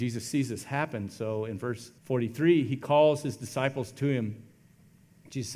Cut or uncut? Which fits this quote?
cut